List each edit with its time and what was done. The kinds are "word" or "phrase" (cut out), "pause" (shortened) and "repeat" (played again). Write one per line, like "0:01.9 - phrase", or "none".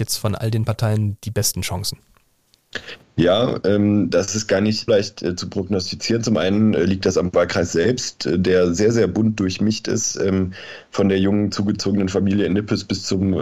0:04.9 - word